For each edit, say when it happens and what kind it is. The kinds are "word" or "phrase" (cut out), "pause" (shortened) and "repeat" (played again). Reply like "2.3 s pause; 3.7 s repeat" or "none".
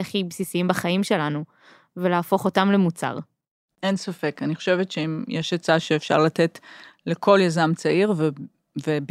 none